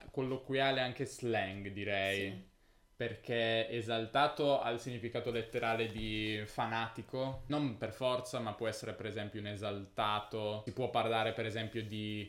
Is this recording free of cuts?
yes; 0 cuts

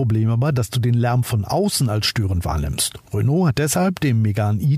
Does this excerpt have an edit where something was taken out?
no; 0 cuts

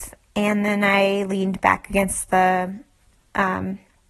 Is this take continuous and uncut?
yes; 0 cuts

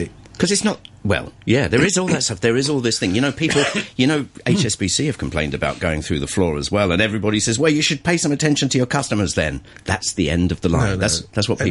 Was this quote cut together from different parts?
no; 0 cuts

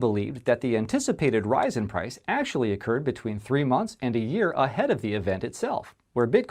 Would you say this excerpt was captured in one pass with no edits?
yes; 0 cuts

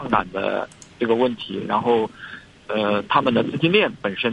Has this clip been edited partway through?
no; 0 cuts

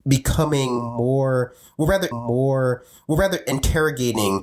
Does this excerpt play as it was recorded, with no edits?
no; 1 cut; at 2.1 s

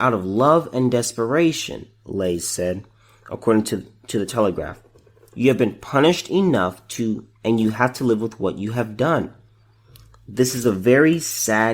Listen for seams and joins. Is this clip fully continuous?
yes; 0 cuts

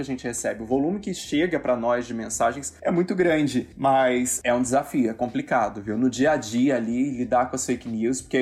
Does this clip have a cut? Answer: yes; 1 cut; at 3.7 s

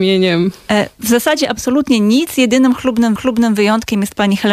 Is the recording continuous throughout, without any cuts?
no; 1 cut; at 3.2 s

